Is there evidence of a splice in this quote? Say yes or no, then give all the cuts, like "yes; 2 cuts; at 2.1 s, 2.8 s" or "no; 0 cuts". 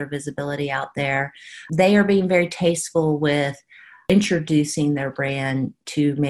no; 0 cuts